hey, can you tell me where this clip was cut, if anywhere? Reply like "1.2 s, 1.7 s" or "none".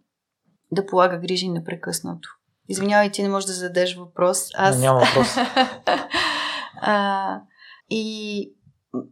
2.4 s, 7.8 s